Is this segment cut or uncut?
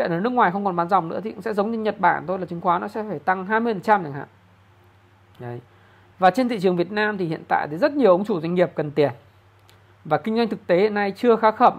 uncut